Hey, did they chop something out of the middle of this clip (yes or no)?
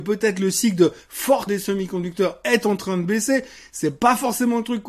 yes